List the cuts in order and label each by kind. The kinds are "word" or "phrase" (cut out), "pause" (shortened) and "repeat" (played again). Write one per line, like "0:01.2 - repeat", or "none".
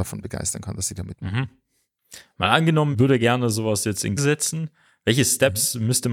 0:02.9 - word
0:04.2 - word